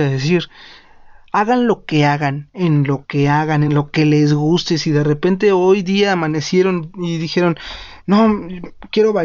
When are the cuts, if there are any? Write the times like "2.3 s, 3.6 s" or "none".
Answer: none